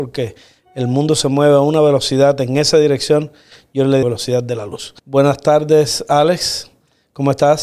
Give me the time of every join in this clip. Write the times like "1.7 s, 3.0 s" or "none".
4.0 s, 5.0 s